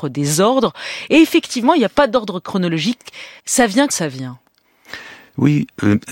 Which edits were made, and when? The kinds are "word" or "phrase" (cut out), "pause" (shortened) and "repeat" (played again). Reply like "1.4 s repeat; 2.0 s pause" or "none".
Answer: 3.4 s pause; 3.9 s word

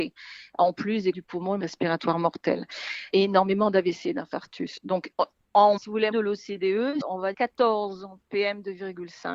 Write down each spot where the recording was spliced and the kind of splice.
1.1 s word; 1.6 s word; 3.1 s word; 5.8 s word; 6.1 s word; 7.0 s word; 7.3 s word

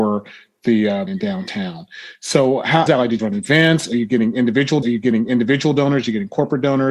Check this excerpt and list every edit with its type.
1.1 s phrase; 2.9 s phrase; 3.2 s phrase; 4.8 s repeat

